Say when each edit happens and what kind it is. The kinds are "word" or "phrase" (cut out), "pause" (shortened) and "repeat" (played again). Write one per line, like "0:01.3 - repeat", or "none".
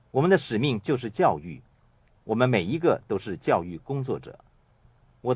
none